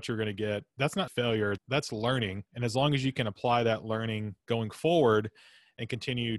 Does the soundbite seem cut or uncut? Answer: cut